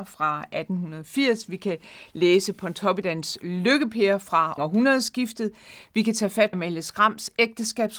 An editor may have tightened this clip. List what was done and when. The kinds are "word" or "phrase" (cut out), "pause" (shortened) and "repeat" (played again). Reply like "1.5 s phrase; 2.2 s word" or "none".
4.6 s word; 6.5 s word